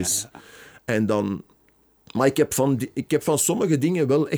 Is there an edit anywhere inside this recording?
no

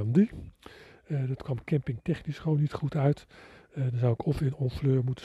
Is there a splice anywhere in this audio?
no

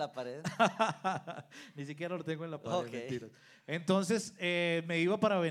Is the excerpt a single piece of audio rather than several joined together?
yes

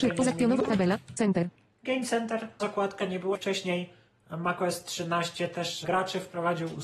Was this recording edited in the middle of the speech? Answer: yes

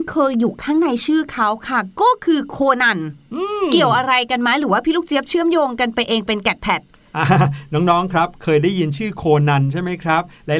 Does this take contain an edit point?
no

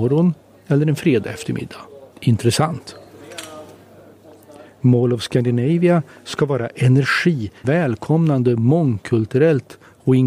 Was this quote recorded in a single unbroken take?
no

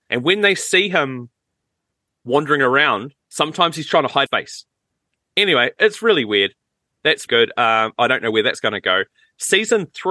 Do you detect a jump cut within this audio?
yes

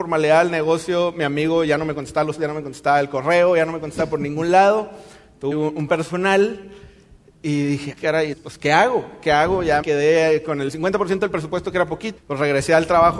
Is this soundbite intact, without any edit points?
no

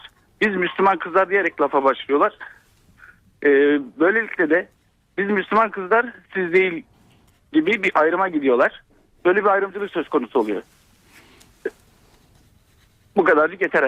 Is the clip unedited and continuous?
yes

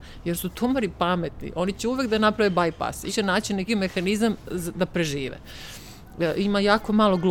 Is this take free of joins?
no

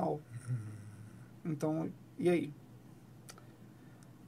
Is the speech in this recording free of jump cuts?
no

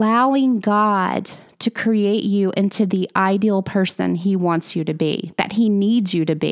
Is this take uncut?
yes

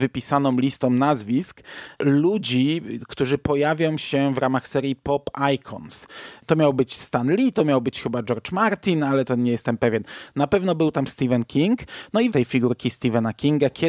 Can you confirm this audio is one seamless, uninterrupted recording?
no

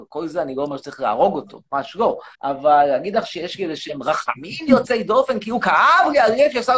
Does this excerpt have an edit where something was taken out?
yes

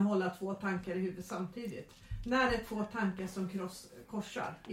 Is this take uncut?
yes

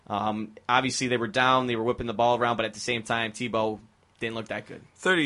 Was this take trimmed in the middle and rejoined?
no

